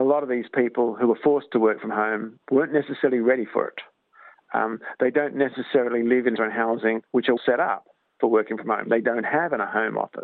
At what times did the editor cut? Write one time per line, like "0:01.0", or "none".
0:02.4
0:06.4
0:07.1
0:07.4